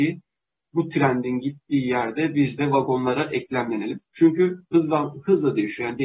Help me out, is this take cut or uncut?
cut